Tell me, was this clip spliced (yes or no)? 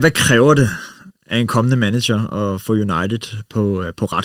no